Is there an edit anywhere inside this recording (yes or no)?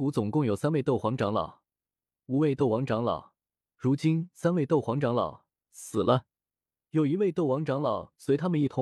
no